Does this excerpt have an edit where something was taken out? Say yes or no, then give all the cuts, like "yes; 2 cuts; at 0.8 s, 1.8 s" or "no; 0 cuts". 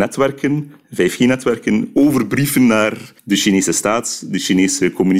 yes; 1 cut; at 3.2 s